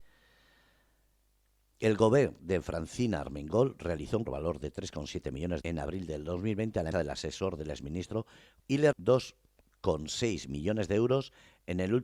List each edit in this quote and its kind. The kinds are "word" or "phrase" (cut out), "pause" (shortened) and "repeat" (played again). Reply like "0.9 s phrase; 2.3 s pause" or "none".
4.3 s phrase; 5.6 s phrase; 6.9 s word; 8.6 s phrase; 8.9 s word